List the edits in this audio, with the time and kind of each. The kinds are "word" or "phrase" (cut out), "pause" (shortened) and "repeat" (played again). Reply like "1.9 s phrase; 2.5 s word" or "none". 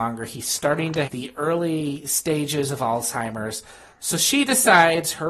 1.1 s word